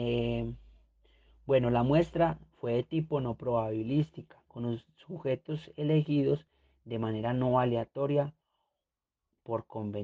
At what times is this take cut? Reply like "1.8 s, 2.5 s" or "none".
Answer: none

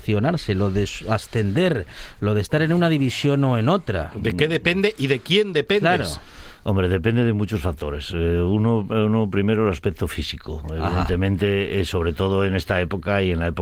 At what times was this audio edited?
none

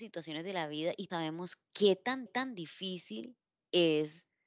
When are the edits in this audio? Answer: 1.1 s, 2.3 s

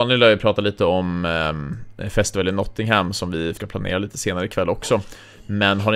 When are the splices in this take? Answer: 3.6 s

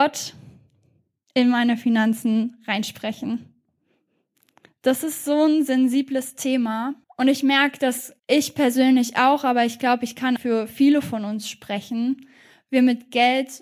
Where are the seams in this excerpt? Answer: 7.0 s, 8.2 s, 10.4 s

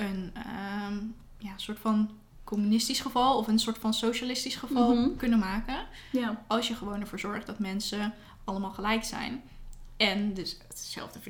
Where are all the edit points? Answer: none

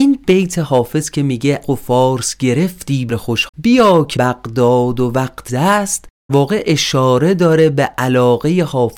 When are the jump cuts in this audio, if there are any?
1.6 s, 3.1 s, 3.5 s, 4.2 s, 5.5 s, 6.3 s

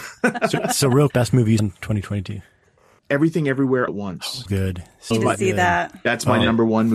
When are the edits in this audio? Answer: 1.1 s, 1.6 s, 3.0 s, 3.9 s, 4.5 s, 5.1 s

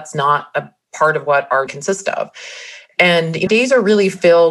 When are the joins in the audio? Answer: 1.7 s, 3.5 s

